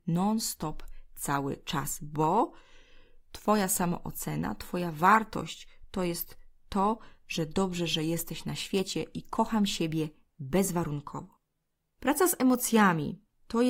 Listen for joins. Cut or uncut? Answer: uncut